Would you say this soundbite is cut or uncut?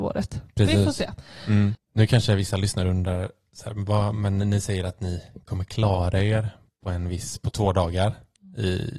uncut